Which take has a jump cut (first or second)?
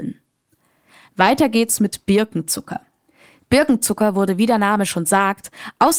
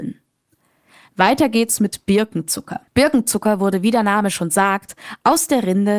second